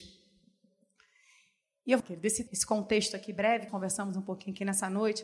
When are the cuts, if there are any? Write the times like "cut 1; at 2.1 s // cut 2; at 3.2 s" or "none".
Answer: cut 1; at 2.0 s // cut 2; at 2.5 s // cut 3; at 3.7 s